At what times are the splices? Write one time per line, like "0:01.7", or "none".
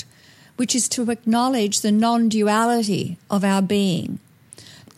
none